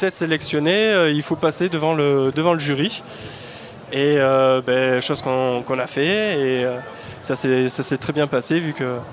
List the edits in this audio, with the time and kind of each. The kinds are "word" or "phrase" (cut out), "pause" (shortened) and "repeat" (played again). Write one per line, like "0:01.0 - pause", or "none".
none